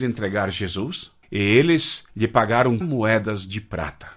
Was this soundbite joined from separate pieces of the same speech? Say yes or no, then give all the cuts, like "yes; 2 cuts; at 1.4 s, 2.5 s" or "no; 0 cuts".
yes; 3 cuts; at 1.2 s, 2.1 s, 2.8 s